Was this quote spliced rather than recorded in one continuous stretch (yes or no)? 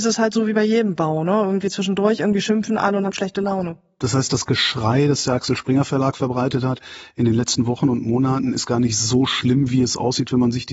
no